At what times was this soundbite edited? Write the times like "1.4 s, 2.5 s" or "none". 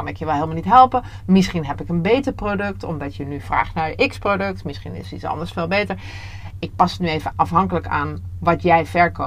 7.3 s